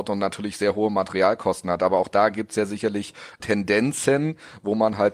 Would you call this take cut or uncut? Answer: cut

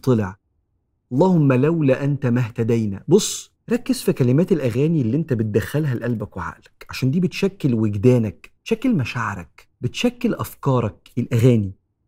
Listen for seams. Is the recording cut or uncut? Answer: cut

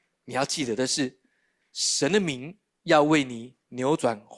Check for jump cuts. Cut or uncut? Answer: uncut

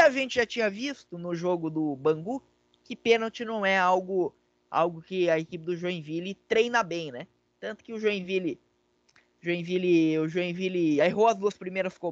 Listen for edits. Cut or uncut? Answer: uncut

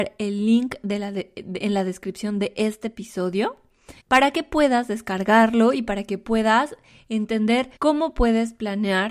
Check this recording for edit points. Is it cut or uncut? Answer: cut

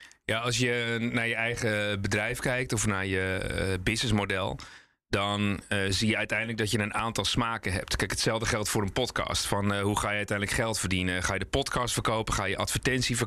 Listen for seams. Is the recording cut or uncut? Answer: uncut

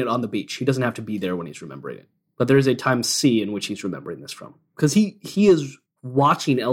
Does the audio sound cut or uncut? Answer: uncut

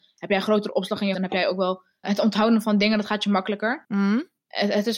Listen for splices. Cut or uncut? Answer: cut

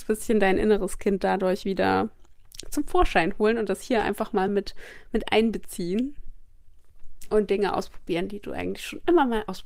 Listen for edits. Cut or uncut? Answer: uncut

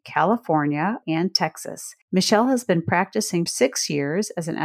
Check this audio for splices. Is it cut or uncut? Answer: cut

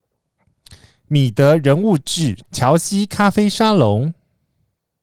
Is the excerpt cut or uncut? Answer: cut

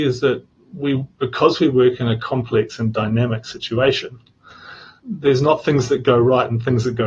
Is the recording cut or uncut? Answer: cut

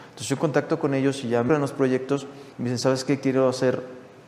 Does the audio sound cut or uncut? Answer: cut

